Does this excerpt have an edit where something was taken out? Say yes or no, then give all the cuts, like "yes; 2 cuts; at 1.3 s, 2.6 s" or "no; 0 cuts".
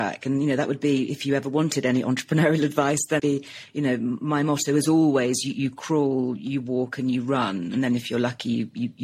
yes; 1 cut; at 3.2 s